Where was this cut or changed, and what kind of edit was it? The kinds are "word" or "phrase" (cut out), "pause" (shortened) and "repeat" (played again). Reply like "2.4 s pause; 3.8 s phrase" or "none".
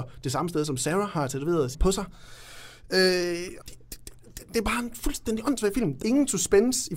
1.7 s phrase; 3.6 s word; 6.0 s word